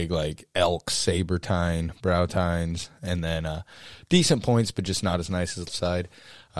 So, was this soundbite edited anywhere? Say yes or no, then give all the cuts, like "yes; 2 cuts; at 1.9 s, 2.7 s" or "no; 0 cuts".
yes; 1 cut; at 5.7 s